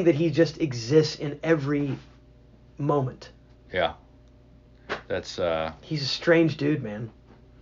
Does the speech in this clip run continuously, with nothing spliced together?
no; 1 cut; at 3.6 s

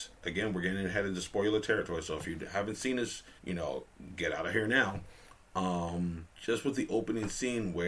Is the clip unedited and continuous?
no; 2 cuts; at 3.4 s, 6.3 s

